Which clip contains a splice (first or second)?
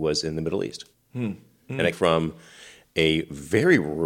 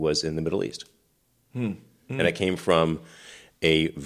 first